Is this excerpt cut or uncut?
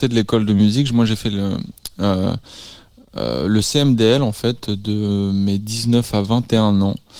uncut